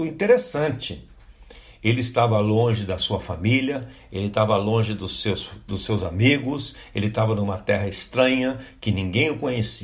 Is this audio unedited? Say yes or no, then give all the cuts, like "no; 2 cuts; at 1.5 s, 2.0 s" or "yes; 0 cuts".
yes; 0 cuts